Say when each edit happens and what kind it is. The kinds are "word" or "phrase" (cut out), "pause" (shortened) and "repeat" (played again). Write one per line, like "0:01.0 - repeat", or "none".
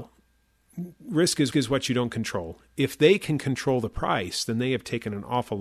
0:01.5 - repeat